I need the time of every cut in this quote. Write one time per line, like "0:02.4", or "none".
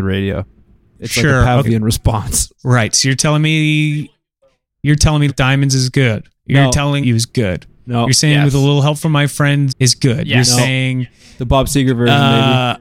0:01.6
0:02.5
0:05.3
0:06.4
0:07.0
0:09.7